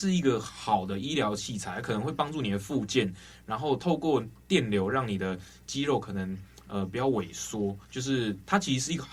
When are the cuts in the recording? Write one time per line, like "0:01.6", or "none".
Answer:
0:07.8